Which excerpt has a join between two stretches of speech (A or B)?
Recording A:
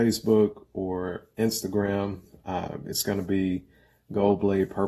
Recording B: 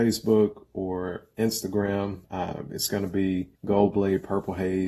B